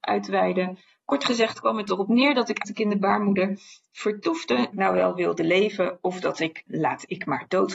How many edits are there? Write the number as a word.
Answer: three